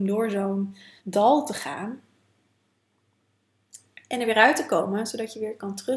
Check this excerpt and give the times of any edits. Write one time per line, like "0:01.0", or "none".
0:01.0